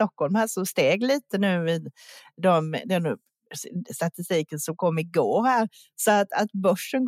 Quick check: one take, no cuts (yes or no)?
yes